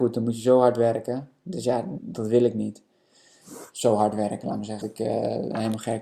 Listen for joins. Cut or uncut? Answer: cut